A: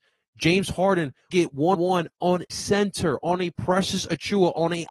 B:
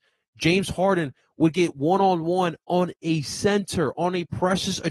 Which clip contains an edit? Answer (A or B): A